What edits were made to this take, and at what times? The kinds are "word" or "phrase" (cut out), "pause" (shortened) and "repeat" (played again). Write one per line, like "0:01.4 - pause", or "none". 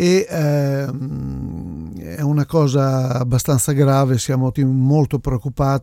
0:04.6 - word